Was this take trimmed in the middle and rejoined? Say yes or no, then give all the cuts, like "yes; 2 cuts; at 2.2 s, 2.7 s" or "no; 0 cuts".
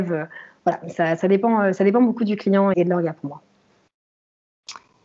yes; 1 cut; at 2.7 s